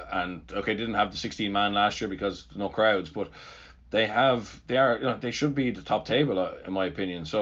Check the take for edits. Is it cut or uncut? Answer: uncut